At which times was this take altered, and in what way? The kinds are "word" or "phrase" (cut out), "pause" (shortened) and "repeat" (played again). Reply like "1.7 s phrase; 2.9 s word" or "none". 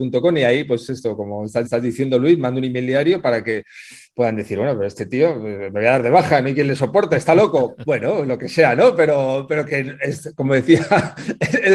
1.6 s repeat; 9.7 s word

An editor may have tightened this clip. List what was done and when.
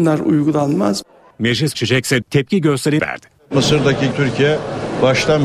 1.7 s phrase; 2.2 s word; 3.0 s word; 4.1 s word

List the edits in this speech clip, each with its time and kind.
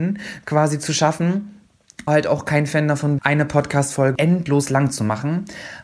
2.1 s word; 3.2 s word; 4.2 s word

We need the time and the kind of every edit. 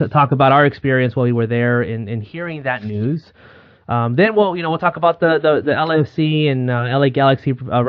none

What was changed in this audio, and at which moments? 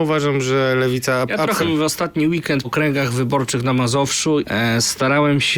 1.6 s word; 2.6 s word; 4.4 s word

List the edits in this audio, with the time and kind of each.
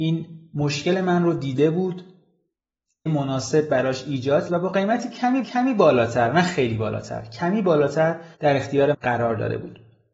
3.1 s phrase; 4.5 s phrase; 5.4 s repeat; 8.3 s pause; 8.9 s word

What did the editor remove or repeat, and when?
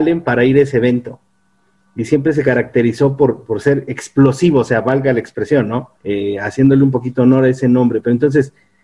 6.0 s pause

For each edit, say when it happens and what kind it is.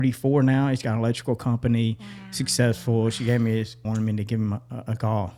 3.8 s phrase

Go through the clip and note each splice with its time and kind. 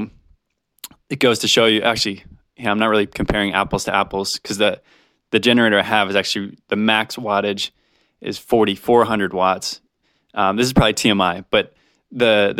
none

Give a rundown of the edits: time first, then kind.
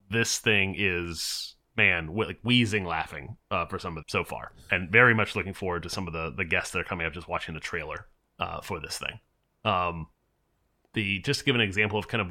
1.7 s word; 4.0 s phrase; 8.2 s pause

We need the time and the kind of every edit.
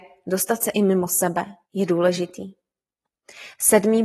1.6 s pause

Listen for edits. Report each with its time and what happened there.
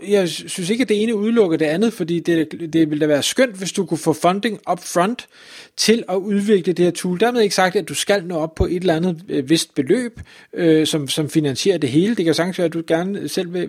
none

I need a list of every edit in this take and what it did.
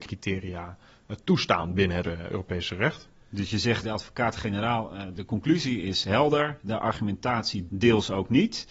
2.0 s word; 3.8 s word; 5.1 s word; 7.7 s word

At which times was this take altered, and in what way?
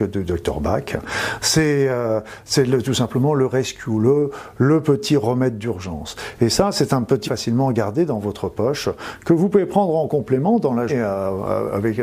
7.2 s phrase; 10.9 s word

